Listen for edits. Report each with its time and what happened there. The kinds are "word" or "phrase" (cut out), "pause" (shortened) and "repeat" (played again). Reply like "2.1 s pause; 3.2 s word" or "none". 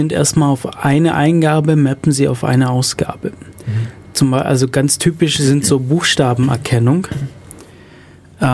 none